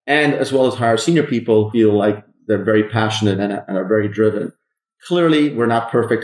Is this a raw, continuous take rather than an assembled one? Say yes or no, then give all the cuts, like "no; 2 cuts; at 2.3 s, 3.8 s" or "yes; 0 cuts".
no; 1 cut; at 1.7 s